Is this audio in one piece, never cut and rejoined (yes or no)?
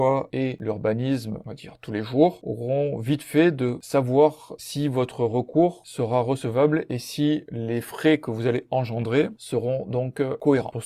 yes